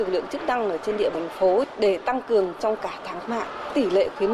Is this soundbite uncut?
no; 3 cuts; at 1.1 s, 2.6 s, 3.3 s

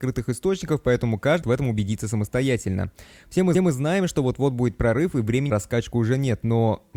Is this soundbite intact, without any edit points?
no; 3 cuts; at 1.4 s, 3.5 s, 5.5 s

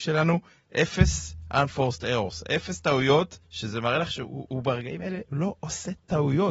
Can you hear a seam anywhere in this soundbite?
yes; 1 cut; at 3.4 s

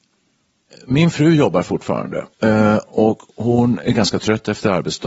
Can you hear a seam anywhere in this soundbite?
yes; 1 cut; at 2.3 s

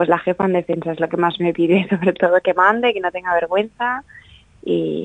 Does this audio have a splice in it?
no; 0 cuts

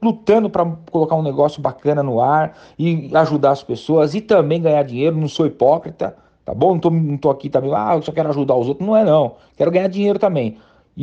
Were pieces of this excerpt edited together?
no; 0 cuts

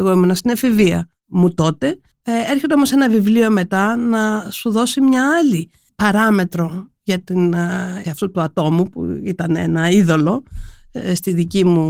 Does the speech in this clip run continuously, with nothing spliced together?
no; 1 cut; at 8.0 s

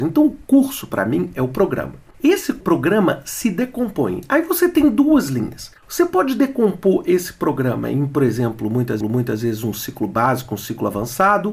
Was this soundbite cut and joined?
yes; 3 cuts; at 2.1 s, 5.8 s, 9.0 s

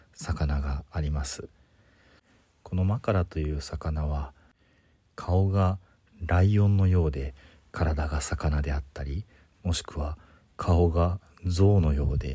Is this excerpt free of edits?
yes; 0 cuts

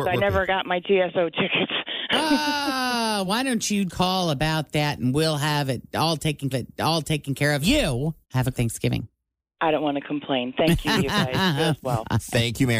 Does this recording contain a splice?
yes; 6 cuts; at 3.3 s, 3.9 s, 6.5 s, 7.6 s, 8.2 s, 8.5 s

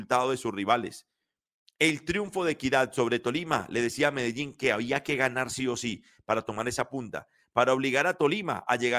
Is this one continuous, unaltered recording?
yes; 0 cuts

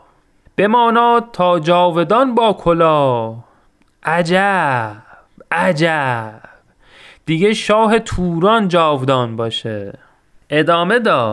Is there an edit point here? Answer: no; 0 cuts

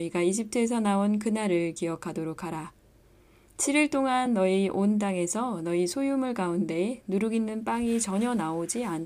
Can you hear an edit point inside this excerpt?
no; 0 cuts

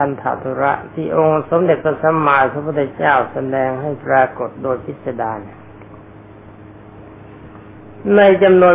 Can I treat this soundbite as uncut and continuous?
yes; 0 cuts

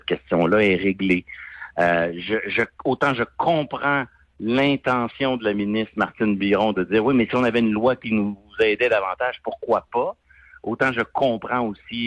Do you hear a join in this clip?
no; 0 cuts

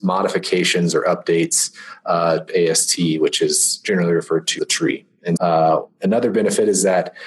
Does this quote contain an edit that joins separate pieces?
yes; 3 cuts; at 2.5 s, 4.6 s, 5.4 s

